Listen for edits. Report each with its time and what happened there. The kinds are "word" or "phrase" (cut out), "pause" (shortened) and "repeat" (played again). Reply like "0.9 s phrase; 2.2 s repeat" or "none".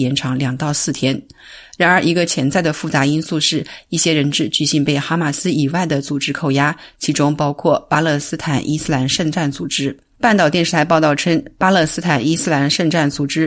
none